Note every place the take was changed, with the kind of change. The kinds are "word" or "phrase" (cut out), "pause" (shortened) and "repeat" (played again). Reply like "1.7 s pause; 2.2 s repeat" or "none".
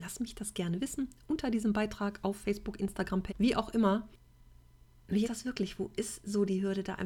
3.3 s word; 5.2 s word